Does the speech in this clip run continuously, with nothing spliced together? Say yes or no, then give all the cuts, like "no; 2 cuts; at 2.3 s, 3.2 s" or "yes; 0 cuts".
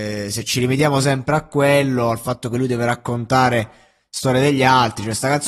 yes; 0 cuts